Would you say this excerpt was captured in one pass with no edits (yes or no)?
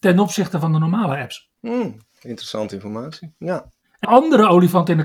no